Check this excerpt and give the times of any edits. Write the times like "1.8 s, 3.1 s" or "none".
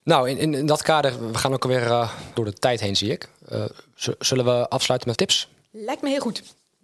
2.4 s, 5.2 s